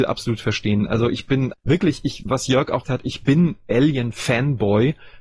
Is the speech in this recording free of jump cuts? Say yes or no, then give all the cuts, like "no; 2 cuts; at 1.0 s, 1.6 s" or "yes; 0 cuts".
no; 3 cuts; at 1.5 s, 2.2 s, 2.8 s